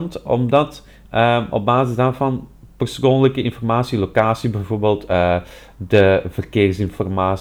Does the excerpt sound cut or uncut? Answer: cut